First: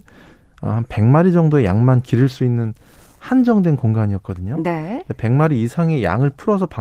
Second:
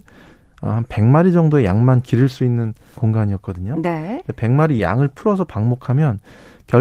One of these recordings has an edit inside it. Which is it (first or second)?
second